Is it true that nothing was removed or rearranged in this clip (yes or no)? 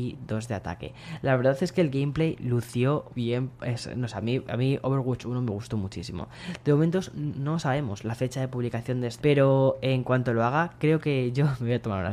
no